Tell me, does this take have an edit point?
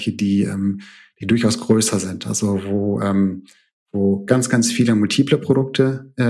no; 0 cuts

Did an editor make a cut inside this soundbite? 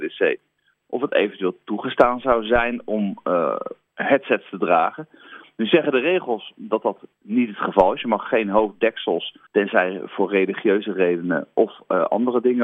yes; 2 cuts; at 3.9 s, 9.5 s

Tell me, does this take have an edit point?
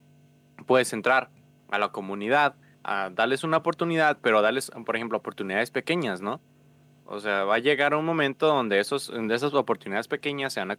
no; 0 cuts

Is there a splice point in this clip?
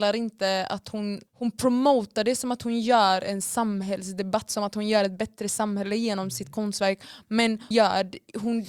yes; 2 cuts; at 1.3 s, 7.7 s

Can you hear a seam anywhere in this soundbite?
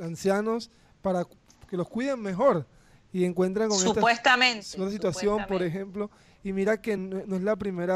no; 0 cuts

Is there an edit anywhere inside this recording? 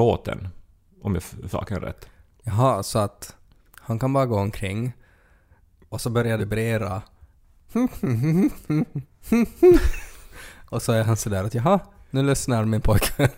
yes; 2 cuts; at 1.5 s, 6.4 s

